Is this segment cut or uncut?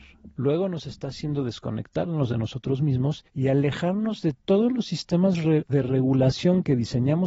cut